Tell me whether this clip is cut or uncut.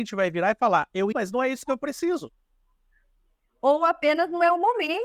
cut